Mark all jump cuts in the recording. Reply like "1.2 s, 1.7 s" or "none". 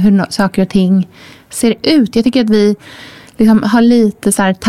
none